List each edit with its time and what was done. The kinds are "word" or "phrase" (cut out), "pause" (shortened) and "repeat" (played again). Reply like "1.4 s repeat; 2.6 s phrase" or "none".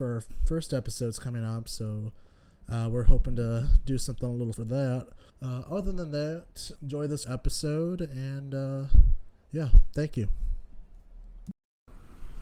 4.5 s word; 5.3 s pause; 6.8 s word; 7.2 s word

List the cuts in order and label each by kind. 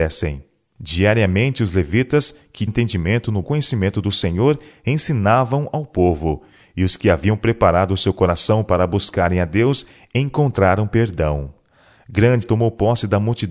2.7 s word; 3.4 s word; 12.4 s word

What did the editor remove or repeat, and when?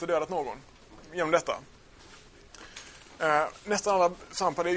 none

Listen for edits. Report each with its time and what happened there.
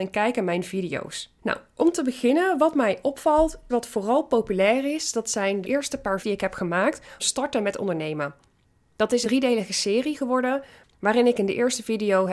3.7 s word; 5.6 s word; 6.2 s word; 7.2 s word; 9.2 s word

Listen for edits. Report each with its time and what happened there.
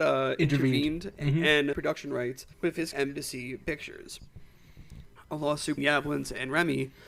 1.7 s word; 2.5 s pause; 2.9 s word; 5.8 s word

